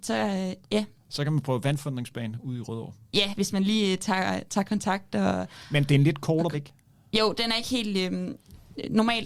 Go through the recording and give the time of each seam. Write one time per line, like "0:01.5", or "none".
0:03.0
0:06.5